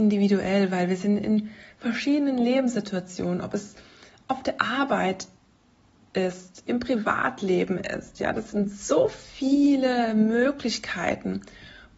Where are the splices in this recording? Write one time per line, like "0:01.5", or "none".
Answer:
none